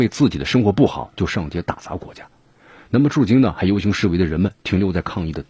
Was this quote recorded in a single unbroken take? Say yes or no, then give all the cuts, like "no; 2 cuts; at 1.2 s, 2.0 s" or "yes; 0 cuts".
yes; 0 cuts